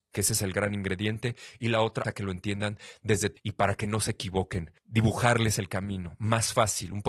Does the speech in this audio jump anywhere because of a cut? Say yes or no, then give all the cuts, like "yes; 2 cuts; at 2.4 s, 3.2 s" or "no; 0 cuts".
yes; 3 cuts; at 2.0 s, 3.4 s, 4.8 s